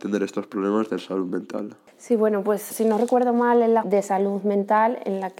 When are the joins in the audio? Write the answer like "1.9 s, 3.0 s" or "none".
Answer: 2.7 s, 3.8 s